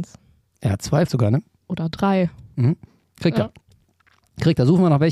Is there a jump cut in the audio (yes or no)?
yes